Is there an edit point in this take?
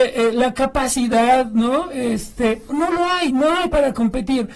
yes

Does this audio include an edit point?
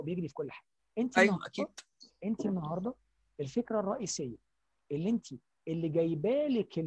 no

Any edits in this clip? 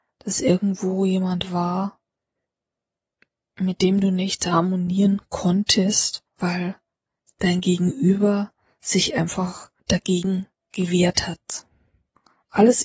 yes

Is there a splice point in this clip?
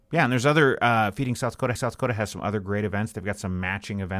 yes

